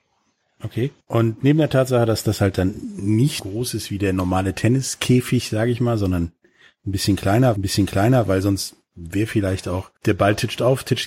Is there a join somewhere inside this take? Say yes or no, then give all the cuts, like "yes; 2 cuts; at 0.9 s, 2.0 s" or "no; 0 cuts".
yes; 4 cuts; at 1.0 s, 3.4 s, 7.6 s, 10.0 s